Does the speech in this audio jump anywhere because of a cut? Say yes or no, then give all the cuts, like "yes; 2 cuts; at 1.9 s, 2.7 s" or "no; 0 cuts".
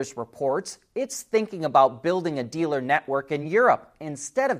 no; 0 cuts